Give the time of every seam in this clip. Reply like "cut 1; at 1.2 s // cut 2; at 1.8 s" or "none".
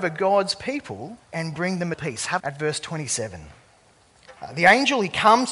cut 1; at 1.2 s // cut 2; at 1.9 s // cut 3; at 2.4 s // cut 4; at 4.4 s